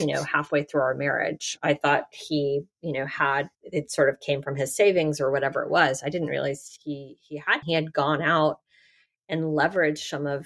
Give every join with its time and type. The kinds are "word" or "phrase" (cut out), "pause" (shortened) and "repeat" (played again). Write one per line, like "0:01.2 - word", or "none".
0:03.5 - pause
0:07.6 - phrase